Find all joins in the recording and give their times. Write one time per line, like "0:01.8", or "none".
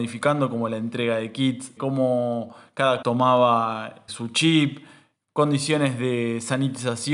0:01.8
0:03.0
0:04.1